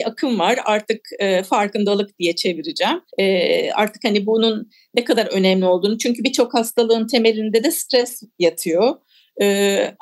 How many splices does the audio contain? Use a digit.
1